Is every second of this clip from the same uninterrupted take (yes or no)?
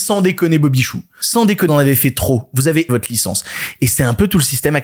no